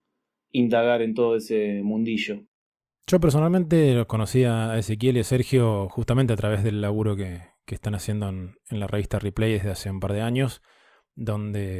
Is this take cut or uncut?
uncut